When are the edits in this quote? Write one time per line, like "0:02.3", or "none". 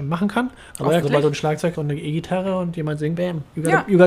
0:01.0
0:01.7
0:03.2